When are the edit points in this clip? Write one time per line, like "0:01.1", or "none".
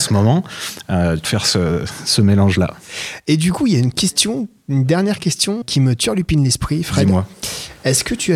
0:01.2
0:05.6